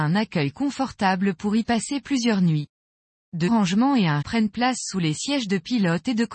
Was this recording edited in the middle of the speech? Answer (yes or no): yes